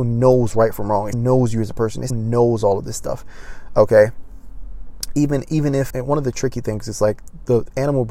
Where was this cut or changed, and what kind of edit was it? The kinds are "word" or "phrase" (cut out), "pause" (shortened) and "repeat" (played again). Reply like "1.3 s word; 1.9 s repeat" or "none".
1.1 s word; 2.1 s word; 5.9 s word